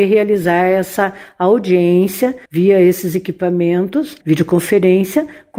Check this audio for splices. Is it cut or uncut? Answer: cut